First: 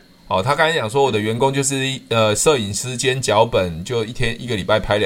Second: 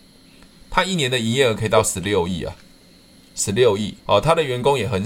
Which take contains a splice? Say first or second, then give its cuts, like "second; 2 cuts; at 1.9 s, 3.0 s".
second; 1 cut; at 4.0 s